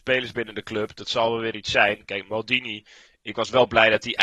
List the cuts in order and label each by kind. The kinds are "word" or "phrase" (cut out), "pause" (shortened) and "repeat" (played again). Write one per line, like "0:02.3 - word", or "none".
none